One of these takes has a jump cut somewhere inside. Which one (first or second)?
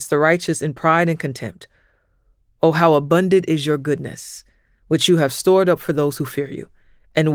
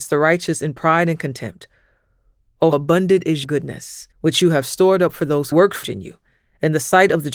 second